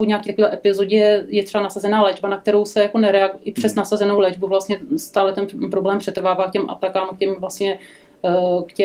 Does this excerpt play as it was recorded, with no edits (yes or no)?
yes